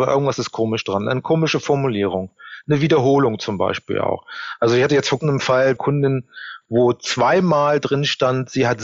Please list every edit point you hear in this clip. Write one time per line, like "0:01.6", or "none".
0:05.2
0:05.8